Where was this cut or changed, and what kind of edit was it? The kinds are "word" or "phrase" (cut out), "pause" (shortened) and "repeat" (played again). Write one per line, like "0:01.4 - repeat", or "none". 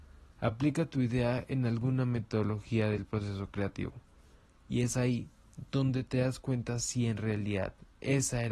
none